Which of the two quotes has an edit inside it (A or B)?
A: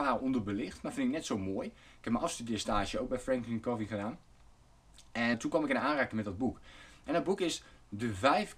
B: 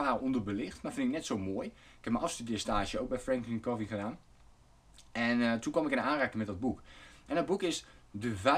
A